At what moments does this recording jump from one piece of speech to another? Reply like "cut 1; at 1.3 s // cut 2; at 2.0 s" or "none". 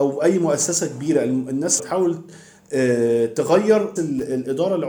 cut 1; at 1.8 s // cut 2; at 4.0 s